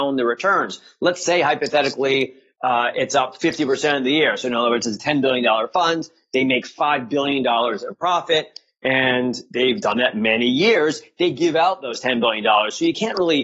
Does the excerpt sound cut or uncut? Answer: uncut